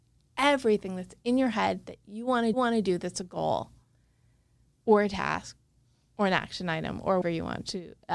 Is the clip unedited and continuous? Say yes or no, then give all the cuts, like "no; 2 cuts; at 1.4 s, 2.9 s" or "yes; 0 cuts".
no; 2 cuts; at 2.5 s, 7.2 s